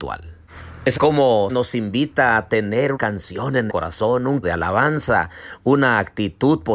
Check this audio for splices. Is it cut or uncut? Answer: cut